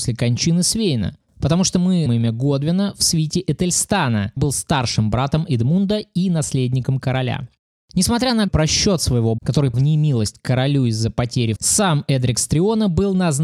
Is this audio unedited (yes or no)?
no